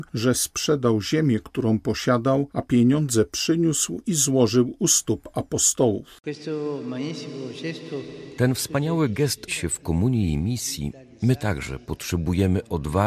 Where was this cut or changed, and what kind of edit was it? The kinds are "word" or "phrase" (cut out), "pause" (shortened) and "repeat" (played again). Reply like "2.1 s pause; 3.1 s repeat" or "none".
9.5 s phrase